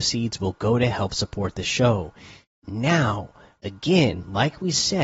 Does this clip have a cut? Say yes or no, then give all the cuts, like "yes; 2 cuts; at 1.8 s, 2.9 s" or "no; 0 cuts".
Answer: no; 0 cuts